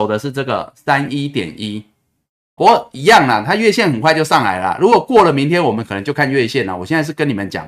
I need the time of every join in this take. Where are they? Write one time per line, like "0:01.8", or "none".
0:02.6